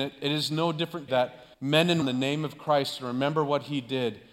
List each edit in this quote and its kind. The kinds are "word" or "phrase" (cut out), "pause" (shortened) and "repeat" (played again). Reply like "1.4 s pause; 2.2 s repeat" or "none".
1.1 s word; 1.5 s pause; 2.0 s phrase